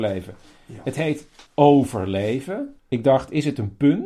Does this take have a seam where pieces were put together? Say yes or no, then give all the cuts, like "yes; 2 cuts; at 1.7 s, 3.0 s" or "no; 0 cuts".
yes; 2 cuts; at 1.5 s, 2.8 s